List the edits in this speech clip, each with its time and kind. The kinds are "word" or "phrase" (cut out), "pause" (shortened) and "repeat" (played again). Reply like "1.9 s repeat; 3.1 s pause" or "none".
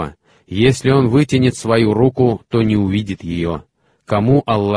none